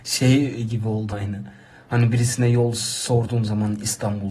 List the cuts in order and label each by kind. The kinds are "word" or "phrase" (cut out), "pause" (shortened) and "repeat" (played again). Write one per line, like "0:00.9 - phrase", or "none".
0:01.1 - word

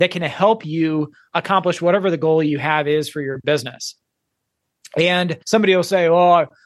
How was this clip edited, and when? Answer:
0:05.4 - pause

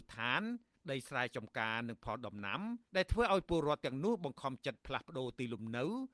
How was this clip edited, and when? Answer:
0:02.8 - pause

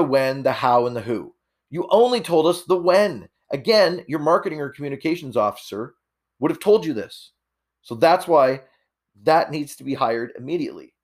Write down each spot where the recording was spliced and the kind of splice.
none

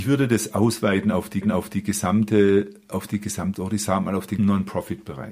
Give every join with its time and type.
0:01.4 - repeat
0:03.5 - word
0:04.4 - word

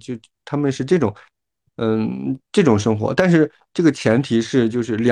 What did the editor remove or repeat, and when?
none

